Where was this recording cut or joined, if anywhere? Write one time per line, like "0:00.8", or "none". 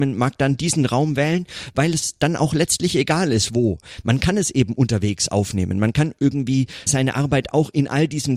0:06.9